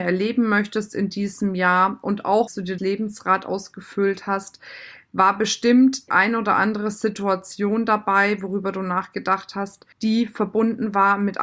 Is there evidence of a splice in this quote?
yes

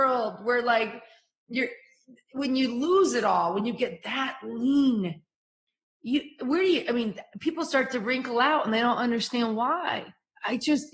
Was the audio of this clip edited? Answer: no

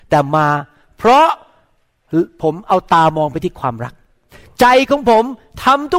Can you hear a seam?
no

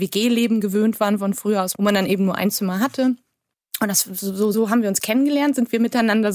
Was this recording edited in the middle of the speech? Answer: yes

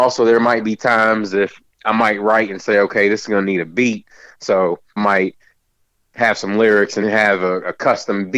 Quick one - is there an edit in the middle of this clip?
yes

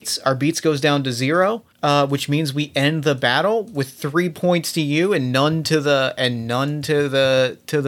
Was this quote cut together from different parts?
yes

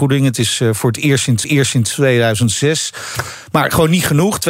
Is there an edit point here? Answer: yes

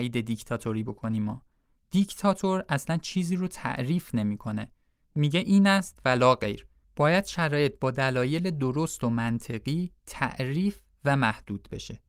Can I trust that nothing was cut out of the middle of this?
no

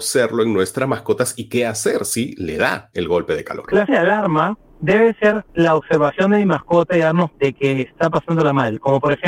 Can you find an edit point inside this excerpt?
yes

